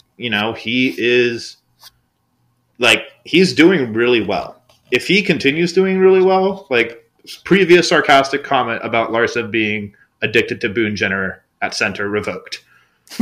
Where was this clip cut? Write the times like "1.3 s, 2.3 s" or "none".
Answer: none